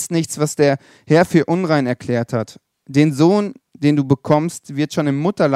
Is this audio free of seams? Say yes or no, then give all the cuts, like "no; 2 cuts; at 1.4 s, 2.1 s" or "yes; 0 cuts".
yes; 0 cuts